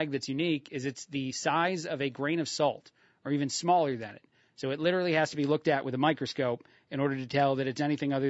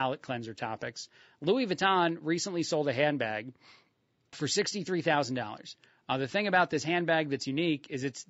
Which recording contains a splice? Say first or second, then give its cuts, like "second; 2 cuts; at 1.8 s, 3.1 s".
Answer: second; 1 cut; at 4.3 s